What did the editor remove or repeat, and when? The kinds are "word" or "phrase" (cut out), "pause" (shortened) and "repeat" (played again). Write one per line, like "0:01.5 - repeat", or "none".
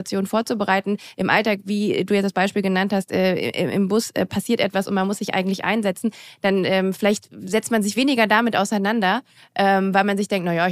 none